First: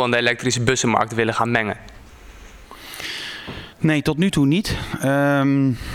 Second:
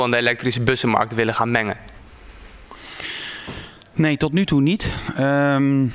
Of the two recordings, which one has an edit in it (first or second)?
first